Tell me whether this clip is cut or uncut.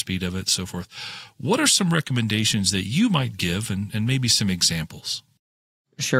uncut